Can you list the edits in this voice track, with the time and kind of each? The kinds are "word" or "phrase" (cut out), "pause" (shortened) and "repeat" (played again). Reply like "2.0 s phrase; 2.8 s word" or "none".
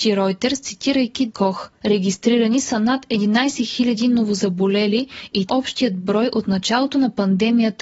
1.3 s phrase; 5.5 s word